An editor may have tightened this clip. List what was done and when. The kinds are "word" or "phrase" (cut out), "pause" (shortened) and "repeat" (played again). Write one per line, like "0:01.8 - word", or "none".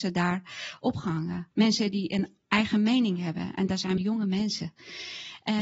0:01.5 - pause
0:04.0 - word